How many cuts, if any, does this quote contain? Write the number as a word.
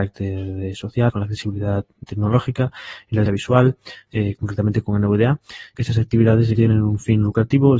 five